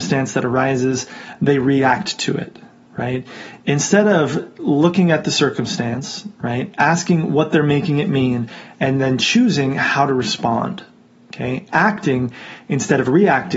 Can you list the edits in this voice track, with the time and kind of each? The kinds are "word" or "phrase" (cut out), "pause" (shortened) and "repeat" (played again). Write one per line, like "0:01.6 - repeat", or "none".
none